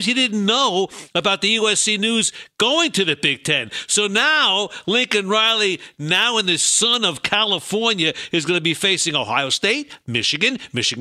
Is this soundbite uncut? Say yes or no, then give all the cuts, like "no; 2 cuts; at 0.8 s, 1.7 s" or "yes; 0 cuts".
yes; 0 cuts